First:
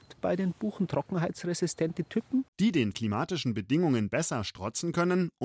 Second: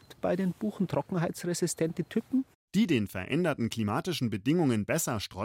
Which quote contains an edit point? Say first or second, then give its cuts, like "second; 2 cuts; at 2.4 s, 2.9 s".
first; 2 cuts; at 2.5 s, 2.9 s